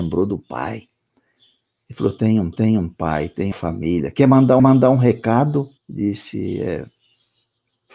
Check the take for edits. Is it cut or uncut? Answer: cut